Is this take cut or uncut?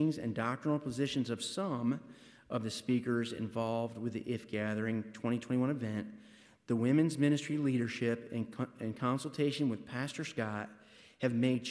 uncut